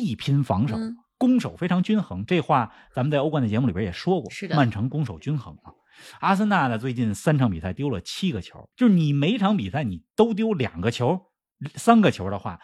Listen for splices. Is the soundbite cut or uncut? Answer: cut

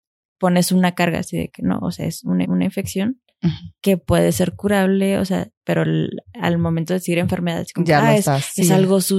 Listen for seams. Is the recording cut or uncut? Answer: cut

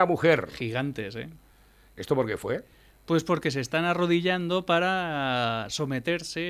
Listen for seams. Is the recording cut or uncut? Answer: uncut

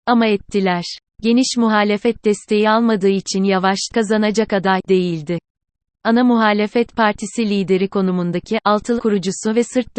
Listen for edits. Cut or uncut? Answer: cut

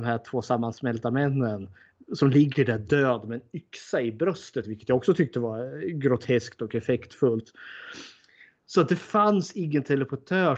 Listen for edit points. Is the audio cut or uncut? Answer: uncut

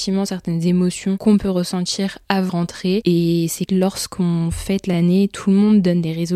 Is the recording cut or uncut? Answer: cut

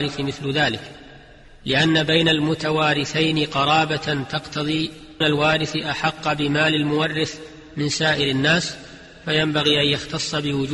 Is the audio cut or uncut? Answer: cut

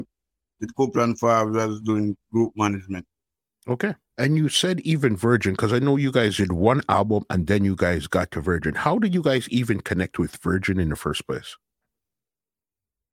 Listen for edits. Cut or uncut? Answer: cut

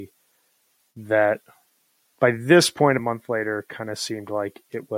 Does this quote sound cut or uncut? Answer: cut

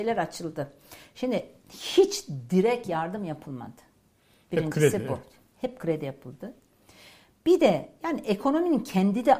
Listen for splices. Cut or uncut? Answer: uncut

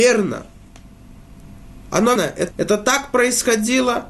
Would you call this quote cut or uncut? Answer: cut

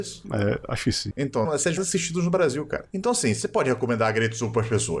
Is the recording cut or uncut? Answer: cut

